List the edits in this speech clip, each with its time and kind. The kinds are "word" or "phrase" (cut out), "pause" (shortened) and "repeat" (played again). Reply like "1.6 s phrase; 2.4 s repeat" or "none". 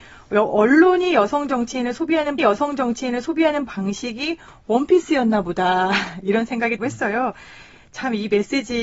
2.4 s repeat; 6.8 s word

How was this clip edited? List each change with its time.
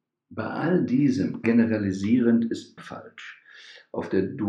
1.4 s word; 2.8 s word

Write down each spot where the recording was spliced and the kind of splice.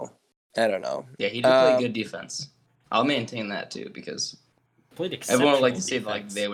none

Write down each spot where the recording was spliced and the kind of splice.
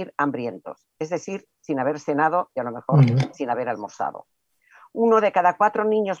none

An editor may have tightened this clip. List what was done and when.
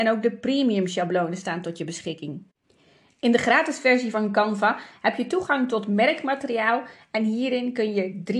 none

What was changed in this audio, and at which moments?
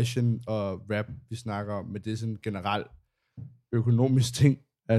none

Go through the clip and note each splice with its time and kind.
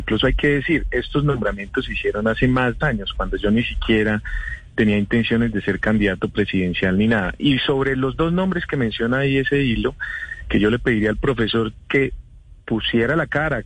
2.8 s word

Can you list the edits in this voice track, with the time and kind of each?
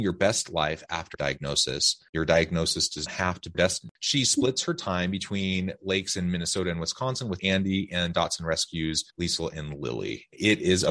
1.1 s word; 2.1 s pause; 3.1 s word; 3.5 s word; 7.4 s phrase; 9.1 s pause

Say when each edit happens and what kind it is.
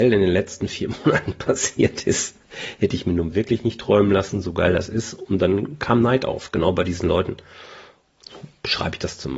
none

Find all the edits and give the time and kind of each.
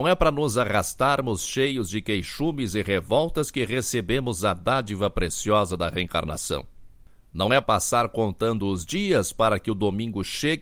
7.6 s word

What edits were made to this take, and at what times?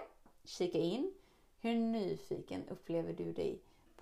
none

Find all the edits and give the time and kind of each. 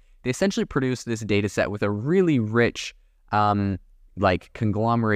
none

